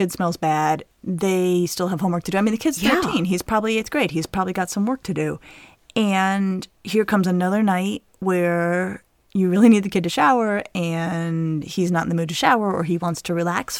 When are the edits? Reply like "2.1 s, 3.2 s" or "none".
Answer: none